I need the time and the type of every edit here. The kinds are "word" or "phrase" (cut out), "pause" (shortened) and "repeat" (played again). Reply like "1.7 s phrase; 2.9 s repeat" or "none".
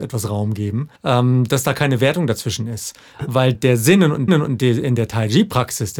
1.0 s pause; 3.5 s word; 4.3 s repeat